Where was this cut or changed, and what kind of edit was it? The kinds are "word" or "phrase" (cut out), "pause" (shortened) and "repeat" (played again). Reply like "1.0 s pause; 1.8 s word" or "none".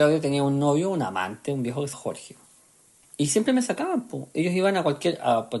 1.9 s word